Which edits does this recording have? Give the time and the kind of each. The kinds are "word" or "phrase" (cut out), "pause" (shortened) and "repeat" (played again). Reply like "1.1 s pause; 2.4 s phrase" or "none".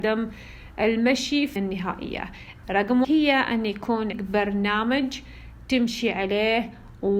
1.6 s word; 2.6 s word; 3.0 s word; 4.1 s word